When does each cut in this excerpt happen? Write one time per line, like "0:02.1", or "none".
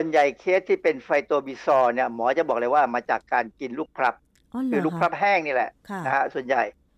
none